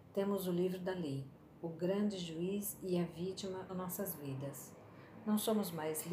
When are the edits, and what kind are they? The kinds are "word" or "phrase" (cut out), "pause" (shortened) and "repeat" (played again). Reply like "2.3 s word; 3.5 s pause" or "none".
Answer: 3.7 s word